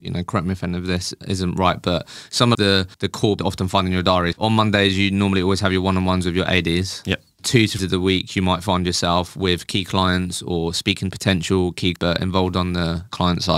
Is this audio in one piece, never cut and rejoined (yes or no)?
no